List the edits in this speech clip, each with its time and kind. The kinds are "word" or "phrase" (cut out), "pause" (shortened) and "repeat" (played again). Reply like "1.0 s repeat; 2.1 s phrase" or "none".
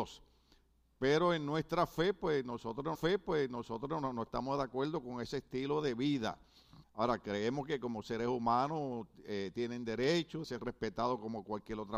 2.9 s repeat; 6.8 s pause; 10.4 s word